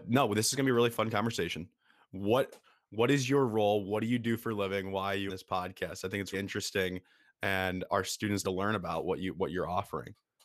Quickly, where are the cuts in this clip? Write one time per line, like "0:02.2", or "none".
0:05.3
0:06.3
0:07.9
0:08.4